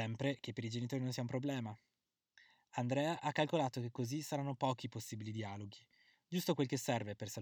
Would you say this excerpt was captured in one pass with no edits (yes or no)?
yes